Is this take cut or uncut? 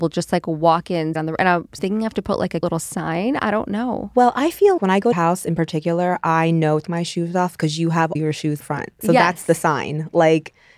cut